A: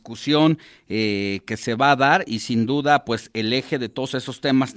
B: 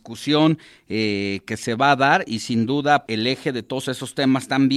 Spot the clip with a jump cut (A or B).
B